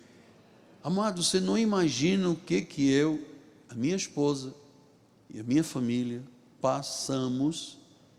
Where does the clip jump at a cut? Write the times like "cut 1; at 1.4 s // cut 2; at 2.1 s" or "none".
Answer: none